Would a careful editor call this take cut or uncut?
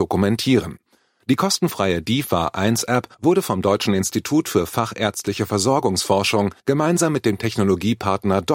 cut